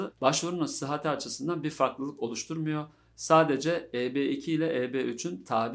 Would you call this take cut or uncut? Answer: uncut